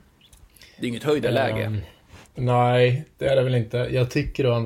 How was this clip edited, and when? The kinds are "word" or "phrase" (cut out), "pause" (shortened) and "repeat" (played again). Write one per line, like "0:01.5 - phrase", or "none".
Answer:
0:02.3 - pause